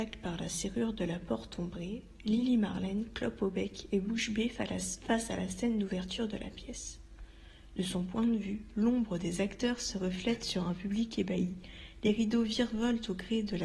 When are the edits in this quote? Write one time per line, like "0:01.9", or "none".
none